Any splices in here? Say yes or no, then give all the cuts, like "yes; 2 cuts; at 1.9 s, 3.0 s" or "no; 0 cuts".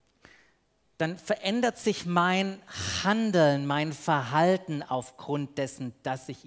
no; 0 cuts